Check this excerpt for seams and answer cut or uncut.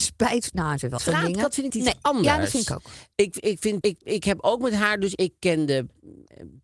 cut